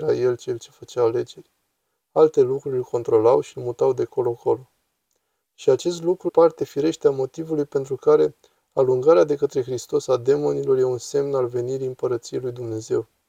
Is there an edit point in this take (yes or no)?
yes